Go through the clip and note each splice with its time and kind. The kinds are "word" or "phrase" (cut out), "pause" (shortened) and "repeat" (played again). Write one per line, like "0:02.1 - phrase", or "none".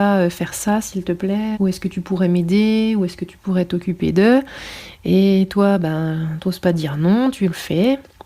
0:01.5 - word